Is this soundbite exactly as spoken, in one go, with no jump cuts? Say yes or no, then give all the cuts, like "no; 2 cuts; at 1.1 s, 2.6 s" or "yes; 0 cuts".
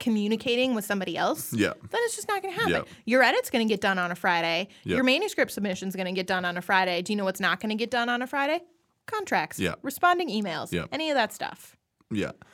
yes; 0 cuts